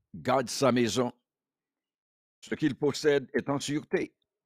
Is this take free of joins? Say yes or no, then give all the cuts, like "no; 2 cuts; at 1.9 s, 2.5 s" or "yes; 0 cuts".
yes; 0 cuts